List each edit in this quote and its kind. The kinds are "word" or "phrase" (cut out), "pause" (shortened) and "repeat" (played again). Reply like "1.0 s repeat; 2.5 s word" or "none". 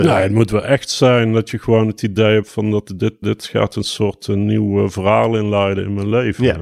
3.2 s word